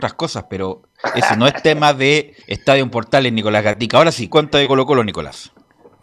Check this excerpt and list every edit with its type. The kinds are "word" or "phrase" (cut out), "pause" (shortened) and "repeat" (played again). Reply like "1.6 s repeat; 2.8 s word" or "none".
2.4 s pause; 4.3 s phrase